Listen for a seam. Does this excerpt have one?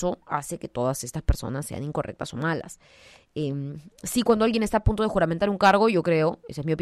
no; 0 cuts

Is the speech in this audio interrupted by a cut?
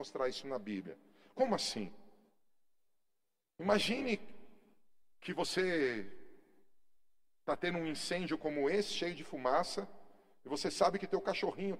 no; 0 cuts

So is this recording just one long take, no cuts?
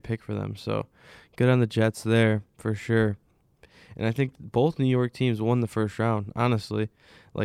yes; 0 cuts

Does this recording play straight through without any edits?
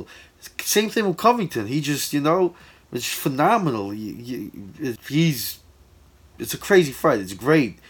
no; 1 cut; at 5.0 s

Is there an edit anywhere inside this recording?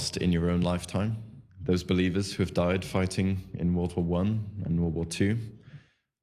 yes; 1 cut; at 1.5 s

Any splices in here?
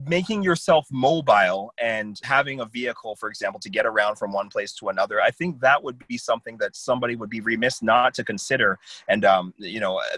yes; 1 cut; at 2.2 s

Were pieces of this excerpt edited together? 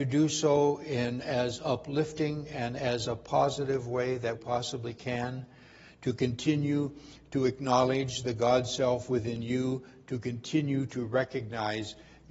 yes; 1 cut; at 4.3 s

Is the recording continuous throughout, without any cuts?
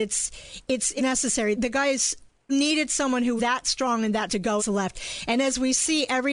no; 6 cuts; at 1.0 s, 1.5 s, 2.5 s, 3.4 s, 4.3 s, 4.6 s

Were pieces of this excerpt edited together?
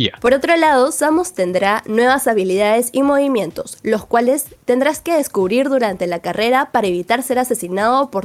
no; 0 cuts

